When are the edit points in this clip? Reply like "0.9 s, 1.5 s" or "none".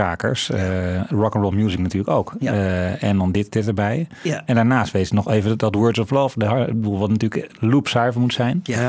none